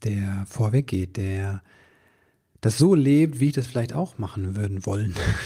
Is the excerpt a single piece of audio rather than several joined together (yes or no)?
yes